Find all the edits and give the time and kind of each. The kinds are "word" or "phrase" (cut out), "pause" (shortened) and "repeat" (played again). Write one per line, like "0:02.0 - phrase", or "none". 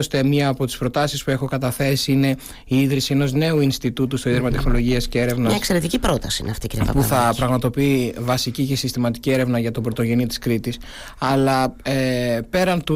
0:10.3 - word